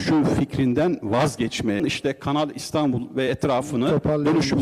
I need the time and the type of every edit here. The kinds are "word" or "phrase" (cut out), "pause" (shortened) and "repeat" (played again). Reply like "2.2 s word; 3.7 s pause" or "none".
none